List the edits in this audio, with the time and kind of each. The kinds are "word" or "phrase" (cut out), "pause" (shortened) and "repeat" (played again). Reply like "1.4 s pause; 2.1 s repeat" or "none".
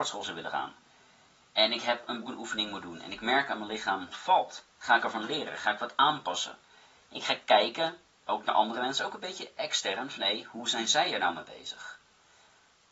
2.2 s phrase; 4.1 s phrase